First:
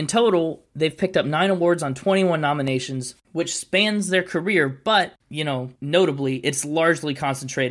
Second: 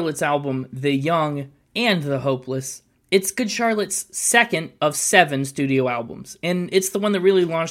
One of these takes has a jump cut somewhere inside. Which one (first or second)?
first